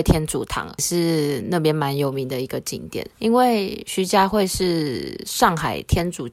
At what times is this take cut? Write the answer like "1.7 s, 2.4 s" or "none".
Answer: 3.1 s